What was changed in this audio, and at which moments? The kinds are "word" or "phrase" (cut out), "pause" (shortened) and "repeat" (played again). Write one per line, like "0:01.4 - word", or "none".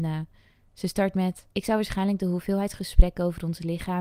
0:01.5 - pause